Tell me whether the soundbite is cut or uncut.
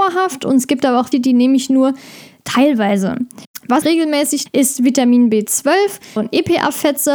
cut